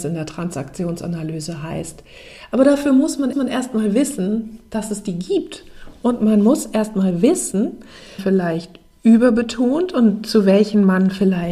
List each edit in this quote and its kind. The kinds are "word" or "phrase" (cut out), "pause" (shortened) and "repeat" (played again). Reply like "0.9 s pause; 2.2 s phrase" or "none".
3.3 s repeat; 8.2 s phrase